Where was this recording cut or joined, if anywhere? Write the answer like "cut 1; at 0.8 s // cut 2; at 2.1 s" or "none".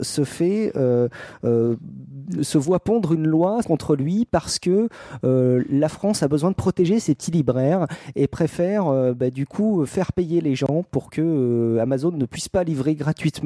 cut 1; at 2.4 s // cut 2; at 3.6 s